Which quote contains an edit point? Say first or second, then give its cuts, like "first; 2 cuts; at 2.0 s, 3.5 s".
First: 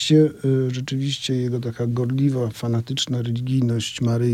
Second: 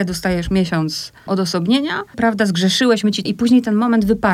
second; 3 cuts; at 1.3 s, 2.1 s, 3.3 s